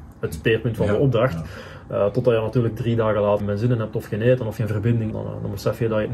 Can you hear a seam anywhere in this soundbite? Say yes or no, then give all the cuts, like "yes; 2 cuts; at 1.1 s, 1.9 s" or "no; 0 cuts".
yes; 3 cuts; at 3.4 s, 4.6 s, 5.1 s